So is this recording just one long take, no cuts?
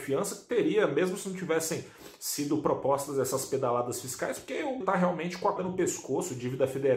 no; 2 cuts; at 4.8 s, 5.6 s

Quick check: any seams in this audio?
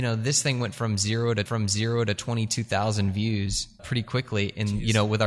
yes; 2 cuts; at 1.5 s, 3.8 s

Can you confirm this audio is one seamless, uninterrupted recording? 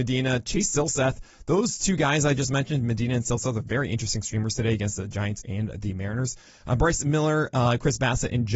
yes; 0 cuts

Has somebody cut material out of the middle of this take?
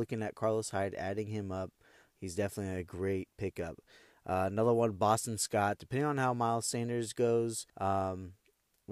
yes; 1 cut; at 7.7 s

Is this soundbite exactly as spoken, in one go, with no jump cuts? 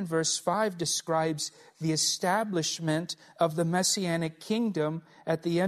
yes; 0 cuts

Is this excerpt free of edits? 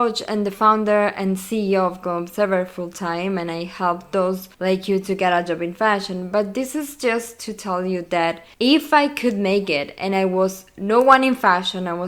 no; 2 cuts; at 4.5 s, 8.5 s

